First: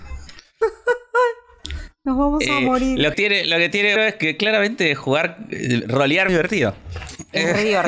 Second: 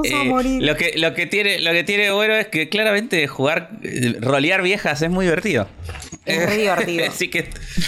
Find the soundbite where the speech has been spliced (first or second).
first